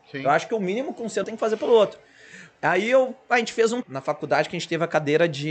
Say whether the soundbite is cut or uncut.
cut